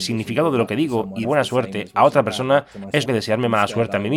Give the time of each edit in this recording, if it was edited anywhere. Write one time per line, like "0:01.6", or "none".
0:01.2
0:03.1

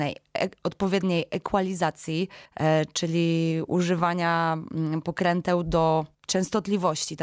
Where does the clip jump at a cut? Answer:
0:02.5
0:06.1

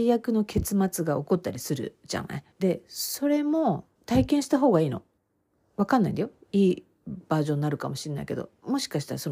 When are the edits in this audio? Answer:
0:02.5
0:03.9
0:05.2

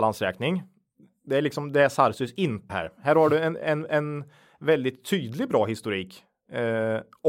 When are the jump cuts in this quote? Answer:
0:02.7

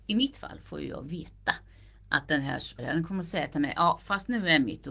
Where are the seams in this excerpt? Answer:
0:02.8

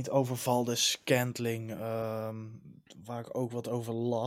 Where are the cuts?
none

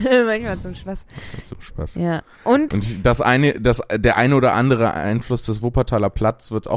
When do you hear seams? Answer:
none

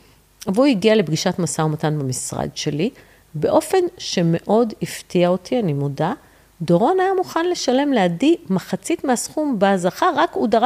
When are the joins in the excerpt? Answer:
none

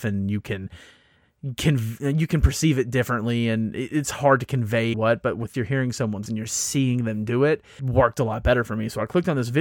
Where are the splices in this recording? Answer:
0:04.9
0:05.5
0:06.3
0:07.8

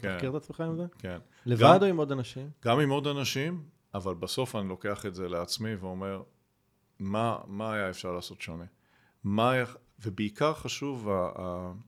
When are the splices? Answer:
none

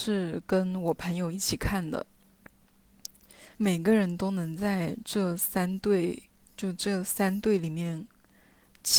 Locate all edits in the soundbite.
0:03.5
0:06.4

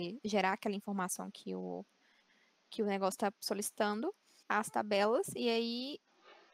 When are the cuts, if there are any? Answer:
0:04.4

